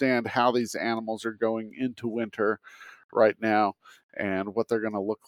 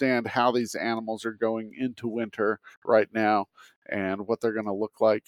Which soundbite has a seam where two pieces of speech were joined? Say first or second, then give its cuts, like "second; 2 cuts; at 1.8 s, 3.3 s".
second; 1 cut; at 2.7 s